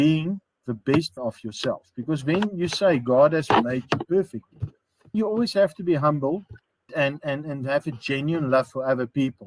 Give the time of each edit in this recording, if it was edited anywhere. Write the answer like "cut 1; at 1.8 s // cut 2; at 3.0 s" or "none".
cut 1; at 1.2 s // cut 2; at 5.1 s // cut 3; at 6.9 s